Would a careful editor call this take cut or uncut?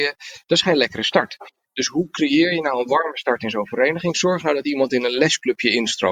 uncut